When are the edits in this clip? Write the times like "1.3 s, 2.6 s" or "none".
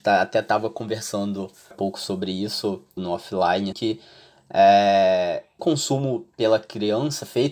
1.7 s, 3.0 s, 3.7 s, 5.6 s